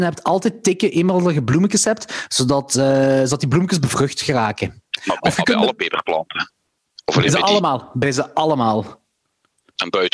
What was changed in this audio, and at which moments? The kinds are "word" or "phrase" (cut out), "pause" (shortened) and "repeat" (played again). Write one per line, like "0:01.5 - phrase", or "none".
none